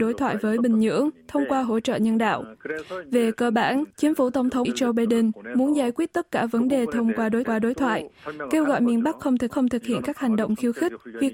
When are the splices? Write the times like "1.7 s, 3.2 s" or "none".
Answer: 3.9 s, 4.6 s, 7.4 s, 9.5 s